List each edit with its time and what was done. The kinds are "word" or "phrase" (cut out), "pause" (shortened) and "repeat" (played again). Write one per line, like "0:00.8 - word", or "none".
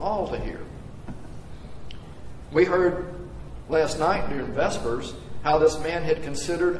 none